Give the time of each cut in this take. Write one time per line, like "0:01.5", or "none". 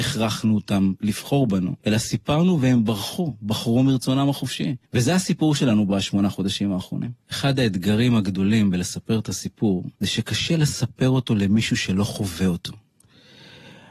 0:01.8
0:04.8
0:07.2
0:09.9